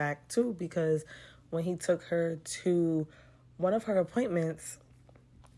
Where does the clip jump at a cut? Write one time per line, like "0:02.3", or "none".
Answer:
none